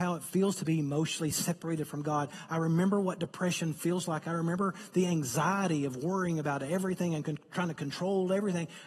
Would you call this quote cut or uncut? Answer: uncut